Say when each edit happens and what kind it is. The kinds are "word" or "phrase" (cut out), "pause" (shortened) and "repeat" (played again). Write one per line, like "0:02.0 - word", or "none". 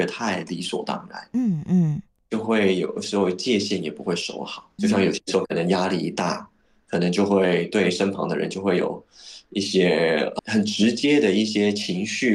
0:04.8 - word
0:10.4 - word